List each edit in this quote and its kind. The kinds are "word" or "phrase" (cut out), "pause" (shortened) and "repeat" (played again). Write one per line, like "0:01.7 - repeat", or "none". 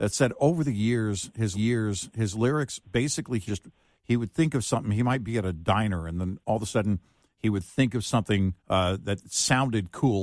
0:01.5 - repeat
0:03.5 - word
0:08.6 - pause

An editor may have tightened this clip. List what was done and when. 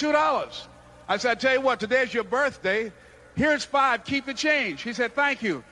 none

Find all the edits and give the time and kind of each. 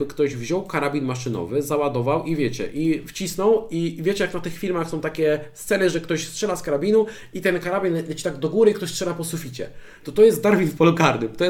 none

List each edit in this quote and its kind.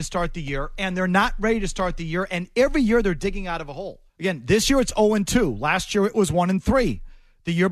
0:04.1 - pause

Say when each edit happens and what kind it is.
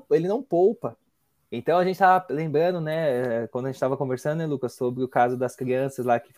0:01.2 - pause

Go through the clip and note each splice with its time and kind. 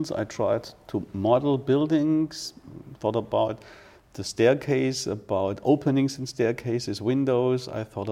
none

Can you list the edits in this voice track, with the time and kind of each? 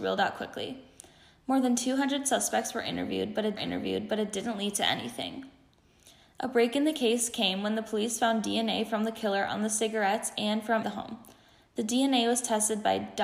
0:03.6 - repeat
0:10.8 - word

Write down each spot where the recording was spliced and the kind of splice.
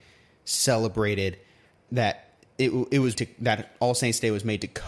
0:01.9 - word
0:03.1 - word

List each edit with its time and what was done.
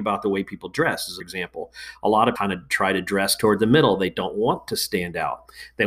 0:01.2 - word
0:02.4 - word

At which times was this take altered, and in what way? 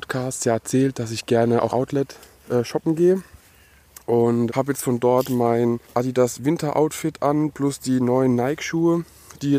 0:01.7 - word
0:04.5 - word
0:05.8 - pause

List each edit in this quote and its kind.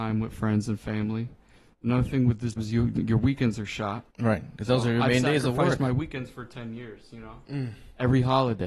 0:02.6 - word
0:04.1 - pause

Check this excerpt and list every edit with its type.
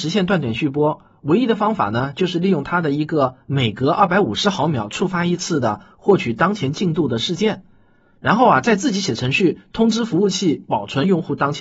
none

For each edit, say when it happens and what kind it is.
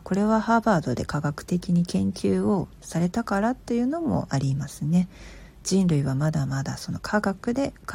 0:05.5 - pause

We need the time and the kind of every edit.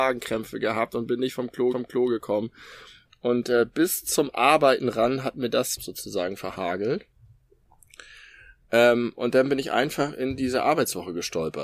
0:01.7 - repeat
0:05.8 - phrase

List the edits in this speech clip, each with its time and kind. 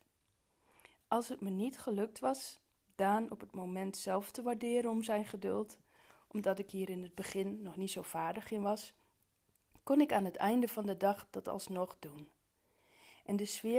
none

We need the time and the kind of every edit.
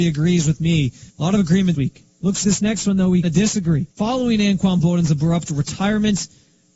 0:01.1 - pause
0:01.7 - word
0:02.4 - word
0:03.2 - word
0:03.9 - pause

